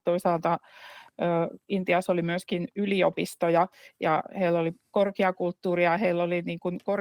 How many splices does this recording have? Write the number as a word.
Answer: zero